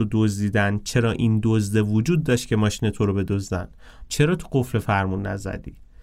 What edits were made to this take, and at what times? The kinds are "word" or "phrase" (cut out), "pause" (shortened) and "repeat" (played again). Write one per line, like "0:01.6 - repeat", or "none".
0:04.1 - word